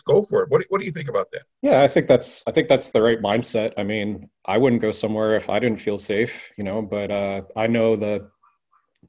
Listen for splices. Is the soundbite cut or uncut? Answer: cut